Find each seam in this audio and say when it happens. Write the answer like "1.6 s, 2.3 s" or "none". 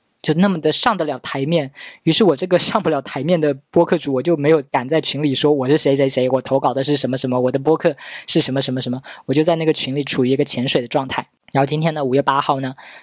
3.7 s, 4.7 s